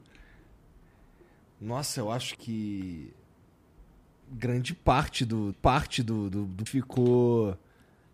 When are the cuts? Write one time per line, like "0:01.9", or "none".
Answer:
0:02.4
0:05.5
0:06.7